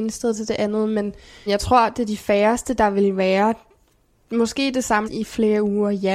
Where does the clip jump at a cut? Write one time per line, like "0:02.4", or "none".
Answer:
0:01.5
0:05.0

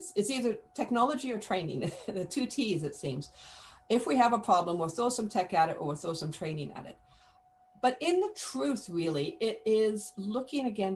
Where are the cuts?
none

